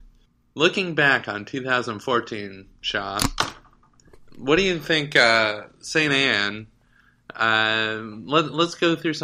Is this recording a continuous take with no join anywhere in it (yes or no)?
yes